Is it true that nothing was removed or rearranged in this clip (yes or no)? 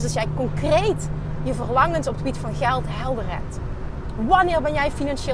yes